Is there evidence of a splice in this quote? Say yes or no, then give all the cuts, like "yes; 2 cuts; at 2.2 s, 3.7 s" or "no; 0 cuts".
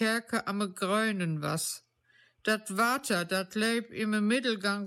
no; 0 cuts